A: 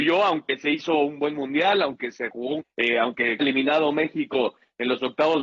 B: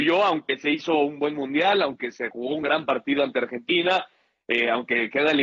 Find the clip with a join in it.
A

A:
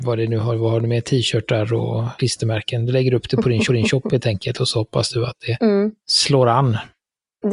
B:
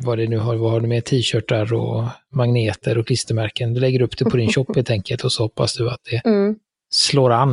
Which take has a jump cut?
A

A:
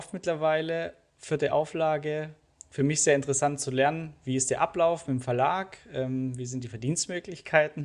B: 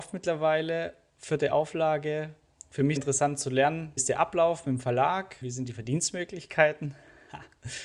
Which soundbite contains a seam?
B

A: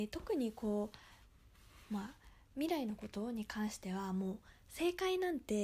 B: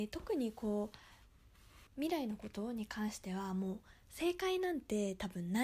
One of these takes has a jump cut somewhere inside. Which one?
B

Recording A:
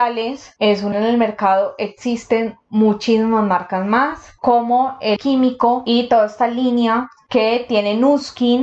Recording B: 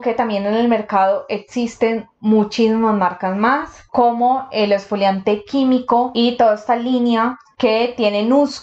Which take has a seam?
A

